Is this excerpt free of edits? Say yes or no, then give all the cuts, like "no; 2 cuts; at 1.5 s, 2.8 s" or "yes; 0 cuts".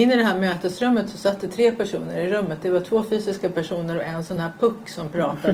yes; 0 cuts